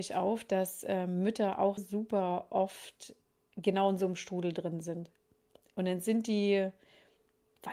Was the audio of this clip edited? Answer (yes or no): yes